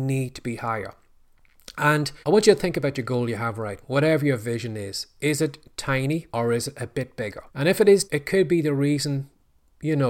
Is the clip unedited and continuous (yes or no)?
no